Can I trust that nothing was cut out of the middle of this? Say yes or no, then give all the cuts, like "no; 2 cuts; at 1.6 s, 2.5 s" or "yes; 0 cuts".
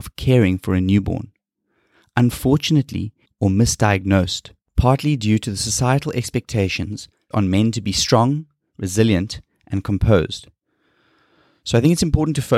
no; 2 cuts; at 3.3 s, 7.3 s